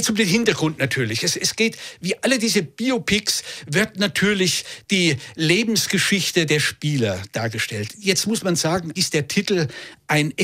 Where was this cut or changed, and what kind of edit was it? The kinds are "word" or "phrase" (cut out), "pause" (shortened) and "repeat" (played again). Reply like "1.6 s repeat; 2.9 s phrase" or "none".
9.0 s word